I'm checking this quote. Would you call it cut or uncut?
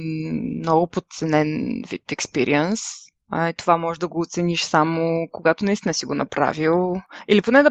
uncut